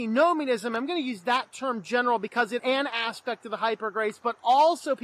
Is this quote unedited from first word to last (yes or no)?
no